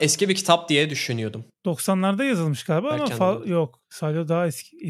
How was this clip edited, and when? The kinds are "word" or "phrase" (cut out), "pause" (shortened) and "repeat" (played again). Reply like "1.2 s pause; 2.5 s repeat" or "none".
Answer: 1.5 s pause